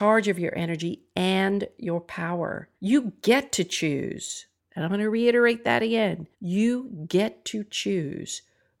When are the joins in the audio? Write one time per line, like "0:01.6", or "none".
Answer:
0:02.8
0:04.6
0:06.3